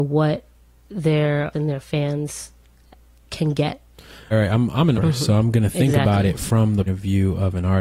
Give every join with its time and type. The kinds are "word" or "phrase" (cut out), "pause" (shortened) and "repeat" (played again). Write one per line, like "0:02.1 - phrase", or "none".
0:01.5 - word
0:04.3 - word
0:04.9 - word
0:06.9 - word